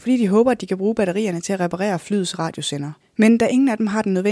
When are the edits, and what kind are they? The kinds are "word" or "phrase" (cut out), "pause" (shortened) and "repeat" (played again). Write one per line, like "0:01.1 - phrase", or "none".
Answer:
0:03.0 - pause